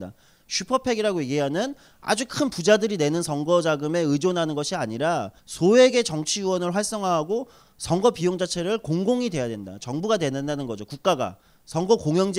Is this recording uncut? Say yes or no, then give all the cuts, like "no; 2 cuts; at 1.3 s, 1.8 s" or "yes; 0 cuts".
no; 1 cut; at 5.4 s